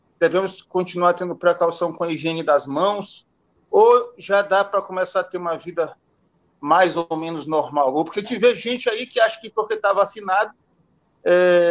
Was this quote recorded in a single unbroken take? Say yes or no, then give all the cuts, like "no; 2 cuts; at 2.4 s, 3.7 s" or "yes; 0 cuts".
yes; 0 cuts